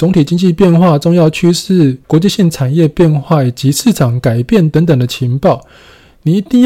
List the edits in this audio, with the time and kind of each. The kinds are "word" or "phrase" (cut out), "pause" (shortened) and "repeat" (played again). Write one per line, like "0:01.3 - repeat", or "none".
0:02.0 - pause